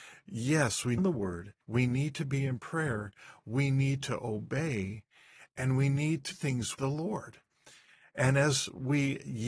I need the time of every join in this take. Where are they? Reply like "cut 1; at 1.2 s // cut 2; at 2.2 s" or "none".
cut 1; at 1.0 s // cut 2; at 1.6 s // cut 3; at 6.3 s // cut 4; at 6.7 s

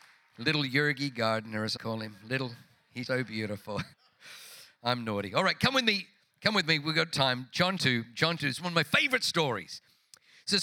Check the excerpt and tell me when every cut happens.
cut 1; at 1.8 s // cut 2; at 3.1 s // cut 3; at 3.9 s // cut 4; at 7.1 s // cut 5; at 7.8 s // cut 6; at 8.4 s

